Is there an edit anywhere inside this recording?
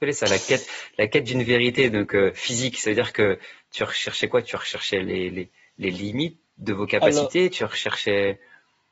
no; 0 cuts

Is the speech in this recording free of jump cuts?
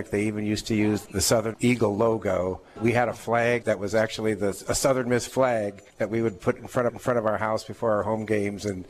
no; 6 cuts; at 1.1 s, 1.5 s, 2.8 s, 3.6 s, 5.9 s, 6.9 s

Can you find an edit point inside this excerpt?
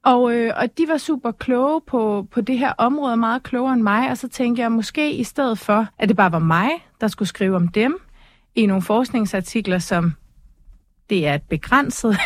yes; 1 cut; at 5.9 s

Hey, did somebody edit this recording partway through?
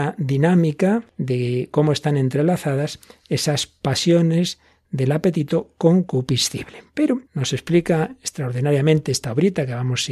yes; 2 cuts; at 1.1 s, 7.3 s

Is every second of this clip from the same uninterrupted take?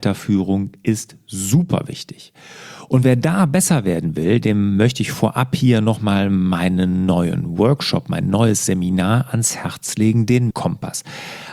no; 1 cut; at 10.5 s

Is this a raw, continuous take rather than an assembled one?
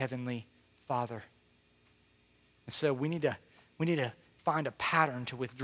yes; 0 cuts

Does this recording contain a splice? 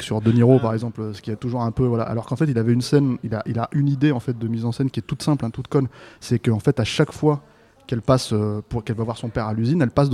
no; 0 cuts

